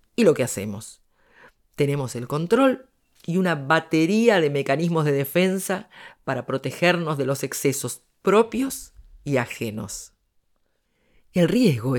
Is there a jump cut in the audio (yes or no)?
no